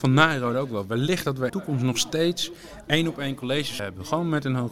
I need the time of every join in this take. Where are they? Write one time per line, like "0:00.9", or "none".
0:01.5
0:03.8